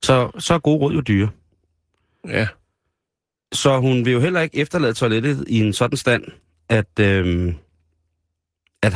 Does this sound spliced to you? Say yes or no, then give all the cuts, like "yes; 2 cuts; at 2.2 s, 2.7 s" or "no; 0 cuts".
no; 0 cuts